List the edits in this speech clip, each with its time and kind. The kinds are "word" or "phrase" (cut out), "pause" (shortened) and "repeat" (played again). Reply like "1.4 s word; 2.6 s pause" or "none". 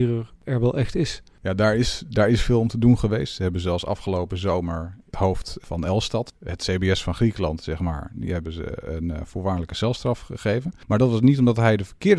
none